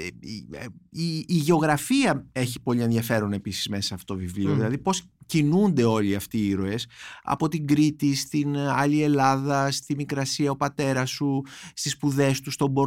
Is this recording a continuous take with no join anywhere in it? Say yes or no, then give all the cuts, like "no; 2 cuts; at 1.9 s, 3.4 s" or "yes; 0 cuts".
yes; 0 cuts